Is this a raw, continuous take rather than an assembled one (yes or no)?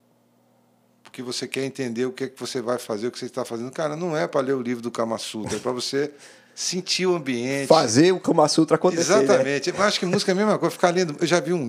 yes